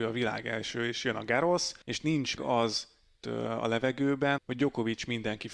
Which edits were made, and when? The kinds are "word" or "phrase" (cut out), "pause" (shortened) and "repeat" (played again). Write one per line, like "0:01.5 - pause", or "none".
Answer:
0:01.8 - pause
0:02.4 - word
0:03.2 - word
0:04.4 - word